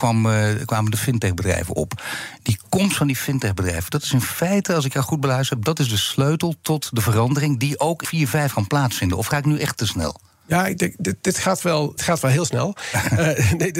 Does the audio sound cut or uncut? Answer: cut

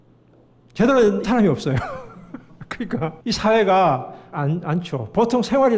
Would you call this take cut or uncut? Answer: cut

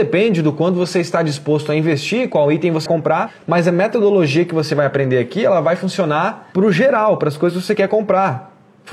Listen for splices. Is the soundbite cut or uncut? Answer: cut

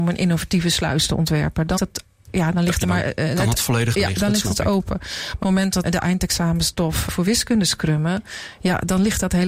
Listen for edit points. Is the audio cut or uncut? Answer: cut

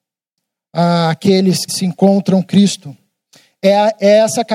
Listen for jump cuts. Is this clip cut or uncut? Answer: cut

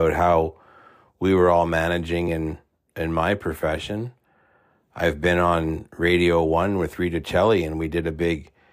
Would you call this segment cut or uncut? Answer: uncut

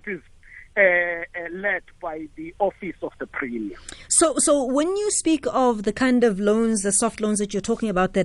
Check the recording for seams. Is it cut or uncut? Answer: uncut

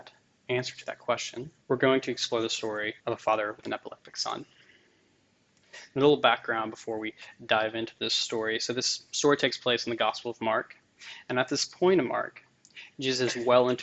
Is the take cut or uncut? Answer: cut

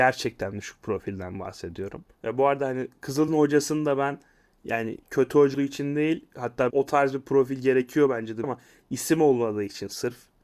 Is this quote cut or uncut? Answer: cut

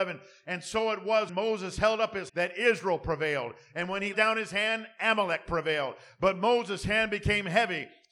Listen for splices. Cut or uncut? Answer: cut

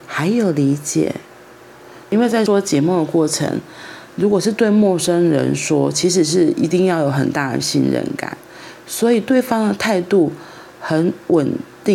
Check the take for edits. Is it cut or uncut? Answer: cut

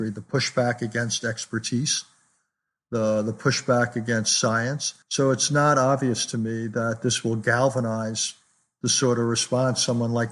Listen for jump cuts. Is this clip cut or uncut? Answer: cut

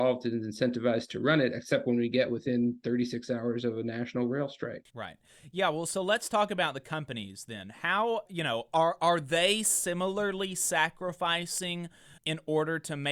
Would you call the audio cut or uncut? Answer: cut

